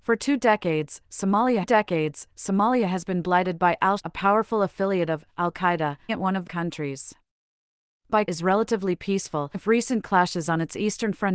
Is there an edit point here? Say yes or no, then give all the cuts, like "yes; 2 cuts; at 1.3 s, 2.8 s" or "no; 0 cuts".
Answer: yes; 6 cuts; at 1.6 s, 4.0 s, 6.1 s, 6.5 s, 8.3 s, 9.5 s